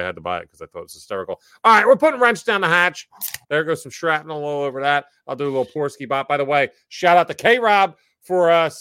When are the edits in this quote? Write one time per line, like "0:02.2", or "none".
0:03.4